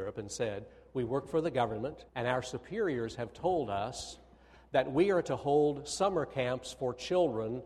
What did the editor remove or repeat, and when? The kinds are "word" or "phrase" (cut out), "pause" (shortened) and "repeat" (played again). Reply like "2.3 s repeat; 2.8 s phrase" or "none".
2.1 s pause